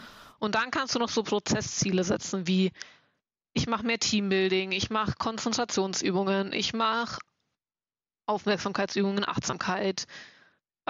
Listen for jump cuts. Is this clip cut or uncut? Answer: uncut